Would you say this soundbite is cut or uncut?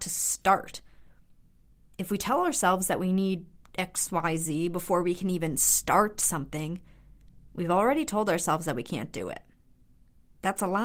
uncut